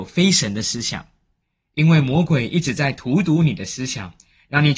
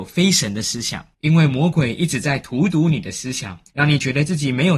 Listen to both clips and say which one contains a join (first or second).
second